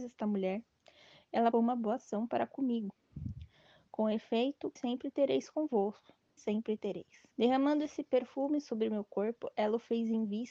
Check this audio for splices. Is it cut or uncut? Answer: cut